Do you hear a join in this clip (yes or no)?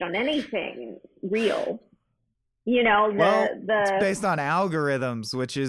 yes